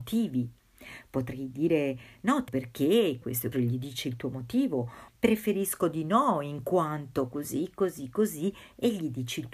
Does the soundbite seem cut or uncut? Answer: cut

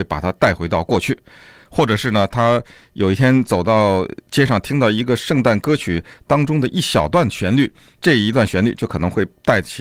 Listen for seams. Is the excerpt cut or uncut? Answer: uncut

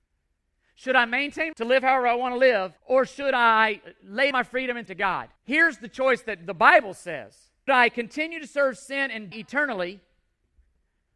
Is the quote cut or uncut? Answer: cut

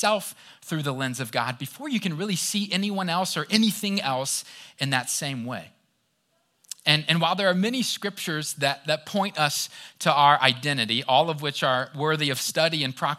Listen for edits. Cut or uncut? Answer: uncut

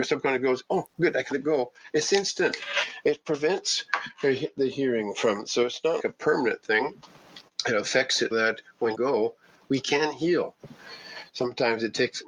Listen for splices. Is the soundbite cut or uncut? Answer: cut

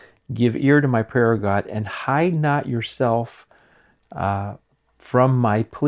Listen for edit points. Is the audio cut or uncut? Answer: uncut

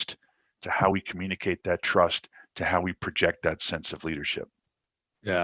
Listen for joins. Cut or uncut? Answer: uncut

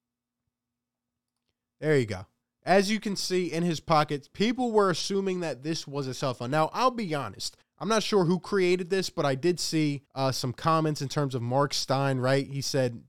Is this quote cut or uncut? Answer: cut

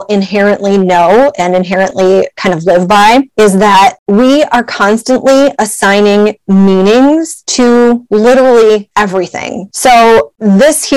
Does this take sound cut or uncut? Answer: uncut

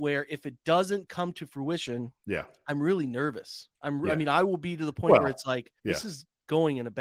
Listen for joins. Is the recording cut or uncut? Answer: cut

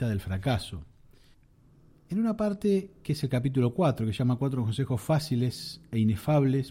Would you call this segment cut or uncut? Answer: cut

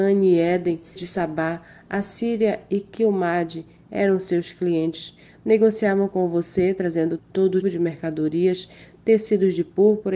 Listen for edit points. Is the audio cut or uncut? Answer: cut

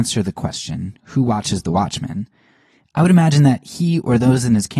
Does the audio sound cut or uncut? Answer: uncut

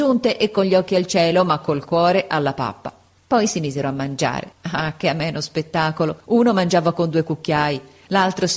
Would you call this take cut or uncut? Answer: cut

